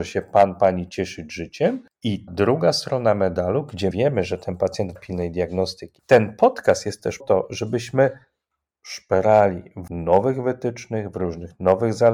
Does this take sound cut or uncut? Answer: cut